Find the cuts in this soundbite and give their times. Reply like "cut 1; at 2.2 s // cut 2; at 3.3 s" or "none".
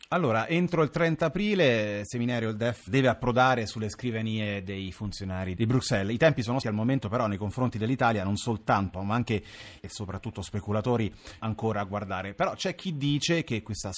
cut 1; at 2.9 s // cut 2; at 5.6 s // cut 3; at 6.6 s // cut 4; at 8.9 s // cut 5; at 9.8 s // cut 6; at 11.4 s